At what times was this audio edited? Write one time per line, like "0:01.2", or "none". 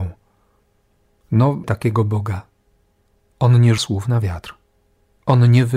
0:01.6
0:03.8